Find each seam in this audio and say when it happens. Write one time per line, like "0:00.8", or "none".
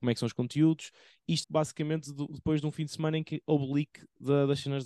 0:01.4